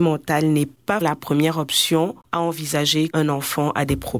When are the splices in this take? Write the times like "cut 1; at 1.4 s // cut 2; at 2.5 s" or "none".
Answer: cut 1; at 1.0 s // cut 2; at 3.1 s